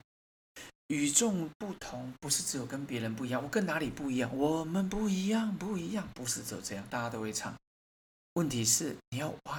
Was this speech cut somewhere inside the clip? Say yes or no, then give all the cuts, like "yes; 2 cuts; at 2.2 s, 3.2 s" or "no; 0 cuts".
no; 0 cuts